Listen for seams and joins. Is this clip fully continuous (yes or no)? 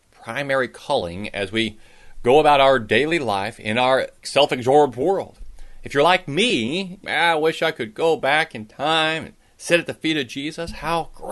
no